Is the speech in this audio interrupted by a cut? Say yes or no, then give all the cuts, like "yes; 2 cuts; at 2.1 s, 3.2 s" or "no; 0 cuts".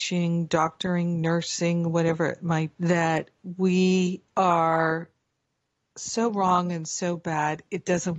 yes; 2 cuts; at 2.7 s, 4.3 s